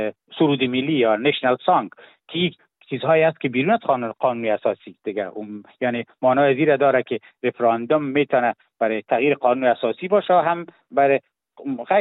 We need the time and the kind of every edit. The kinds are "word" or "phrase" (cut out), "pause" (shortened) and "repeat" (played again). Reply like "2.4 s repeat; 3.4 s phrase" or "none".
none